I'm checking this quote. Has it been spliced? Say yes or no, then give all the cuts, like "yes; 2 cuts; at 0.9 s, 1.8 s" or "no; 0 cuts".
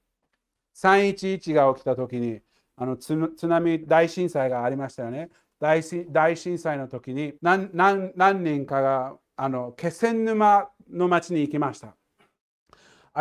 yes; 1 cut; at 7.4 s